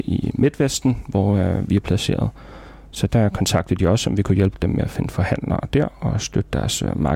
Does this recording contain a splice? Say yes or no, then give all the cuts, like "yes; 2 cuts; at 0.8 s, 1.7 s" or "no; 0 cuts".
no; 0 cuts